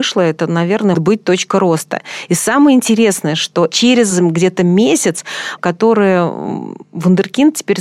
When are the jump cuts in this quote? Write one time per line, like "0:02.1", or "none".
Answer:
0:00.9
0:05.6